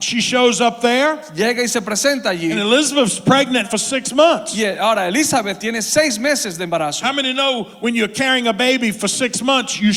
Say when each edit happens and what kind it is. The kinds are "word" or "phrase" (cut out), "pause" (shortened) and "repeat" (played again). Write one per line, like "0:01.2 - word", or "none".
0:03.6 - word